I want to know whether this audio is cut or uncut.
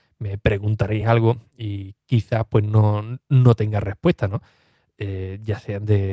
uncut